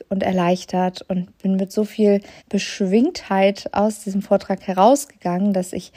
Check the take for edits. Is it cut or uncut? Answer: cut